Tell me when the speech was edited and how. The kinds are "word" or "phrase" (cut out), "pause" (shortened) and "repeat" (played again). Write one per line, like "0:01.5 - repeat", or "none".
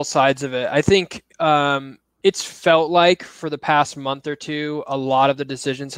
0:01.3 - pause